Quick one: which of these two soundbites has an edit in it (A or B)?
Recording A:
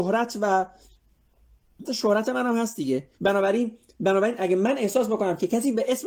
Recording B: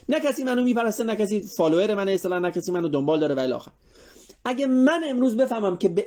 A